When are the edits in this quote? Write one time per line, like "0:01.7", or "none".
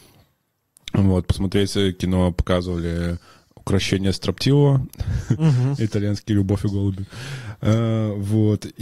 none